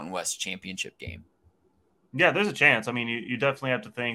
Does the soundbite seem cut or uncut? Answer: uncut